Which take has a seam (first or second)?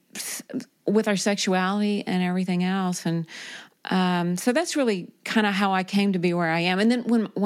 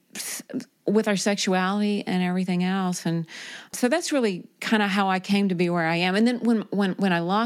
second